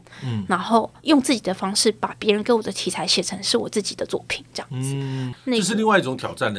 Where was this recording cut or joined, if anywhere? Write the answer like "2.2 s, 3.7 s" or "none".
1.0 s